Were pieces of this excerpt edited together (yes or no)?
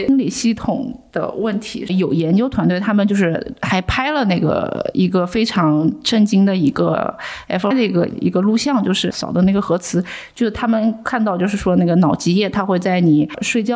yes